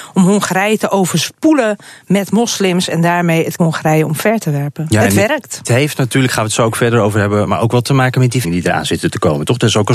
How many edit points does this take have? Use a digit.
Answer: 4